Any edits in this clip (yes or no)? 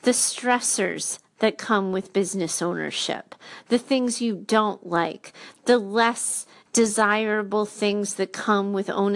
no